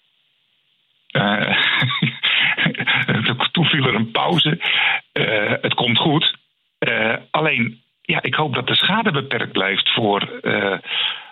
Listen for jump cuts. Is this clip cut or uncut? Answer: uncut